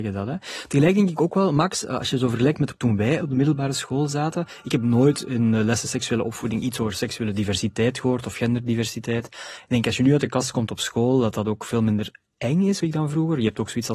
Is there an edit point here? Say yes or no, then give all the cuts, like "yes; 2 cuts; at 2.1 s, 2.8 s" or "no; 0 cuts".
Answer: yes; 1 cut; at 12.8 s